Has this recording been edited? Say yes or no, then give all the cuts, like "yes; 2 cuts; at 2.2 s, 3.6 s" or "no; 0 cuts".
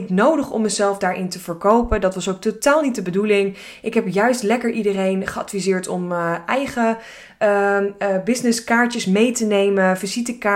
no; 0 cuts